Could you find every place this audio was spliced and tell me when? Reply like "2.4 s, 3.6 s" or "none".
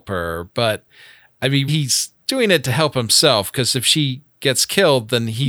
1.7 s